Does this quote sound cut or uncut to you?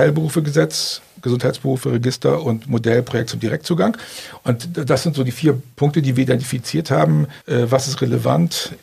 cut